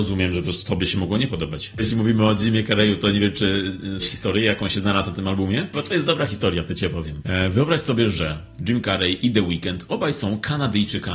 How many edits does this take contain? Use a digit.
1